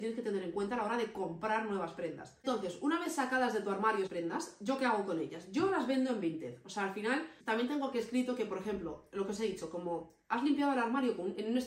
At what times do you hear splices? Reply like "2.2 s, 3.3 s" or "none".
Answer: 4.1 s, 7.4 s